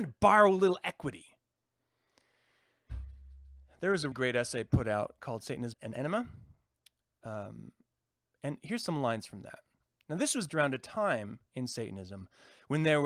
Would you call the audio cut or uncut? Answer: cut